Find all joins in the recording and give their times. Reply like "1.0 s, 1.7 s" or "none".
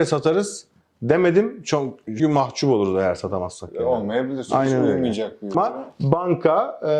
2.2 s, 5.5 s